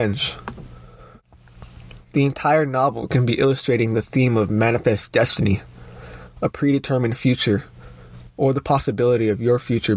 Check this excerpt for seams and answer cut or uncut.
uncut